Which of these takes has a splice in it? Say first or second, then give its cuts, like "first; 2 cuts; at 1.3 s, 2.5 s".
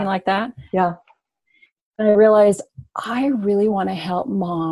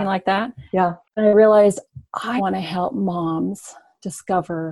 second; 2 cuts; at 1.0 s, 2.4 s